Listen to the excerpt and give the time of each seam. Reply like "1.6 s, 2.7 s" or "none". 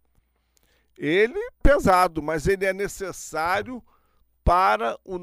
1.6 s